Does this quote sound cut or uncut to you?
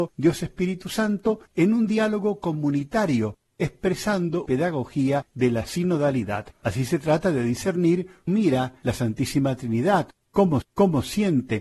cut